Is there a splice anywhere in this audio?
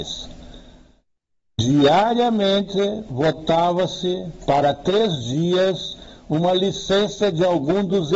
no; 0 cuts

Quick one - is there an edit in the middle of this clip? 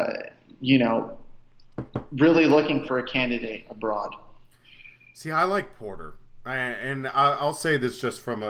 yes; 1 cut; at 2.9 s

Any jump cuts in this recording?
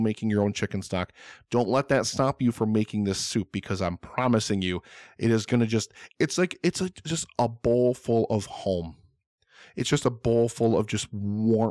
no; 0 cuts

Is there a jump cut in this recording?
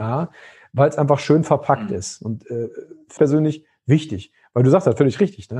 yes; 1 cut; at 3.2 s

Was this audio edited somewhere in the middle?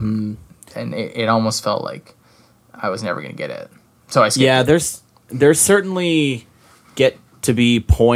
no; 0 cuts

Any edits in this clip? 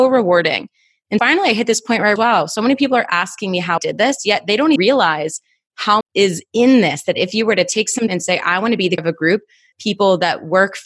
yes; 8 cuts; at 1.2 s, 2.2 s, 3.8 s, 4.8 s, 6.0 s, 8.1 s, 9.0 s, 9.7 s

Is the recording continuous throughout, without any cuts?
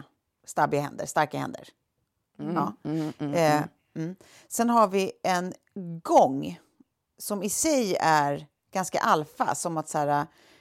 yes; 0 cuts

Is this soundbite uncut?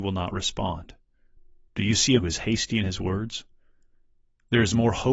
no; 2 cuts; at 1.4 s, 2.2 s

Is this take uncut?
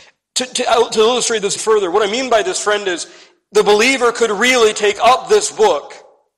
no; 1 cut; at 1.6 s

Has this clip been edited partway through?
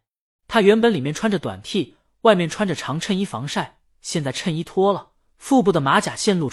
no; 0 cuts

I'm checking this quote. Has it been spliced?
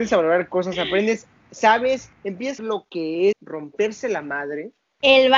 yes; 3 cuts; at 2.1 s, 2.6 s, 3.3 s

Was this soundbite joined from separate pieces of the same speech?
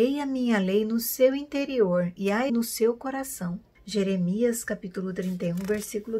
yes; 3 cuts; at 2.2 s, 2.5 s, 3.7 s

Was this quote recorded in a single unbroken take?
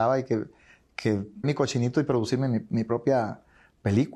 no; 1 cut; at 1.4 s

